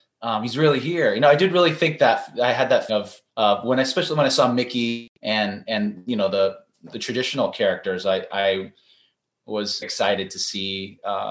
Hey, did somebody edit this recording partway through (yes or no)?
yes